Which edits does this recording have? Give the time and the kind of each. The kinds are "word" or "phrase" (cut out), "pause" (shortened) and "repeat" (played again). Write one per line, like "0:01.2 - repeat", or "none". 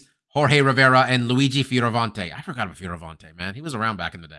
none